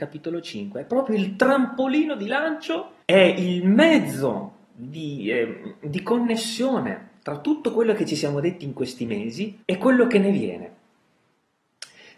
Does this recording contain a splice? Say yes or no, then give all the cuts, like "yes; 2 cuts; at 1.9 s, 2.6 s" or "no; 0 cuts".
yes; 2 cuts; at 3.0 s, 9.6 s